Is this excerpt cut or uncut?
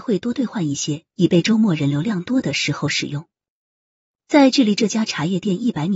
uncut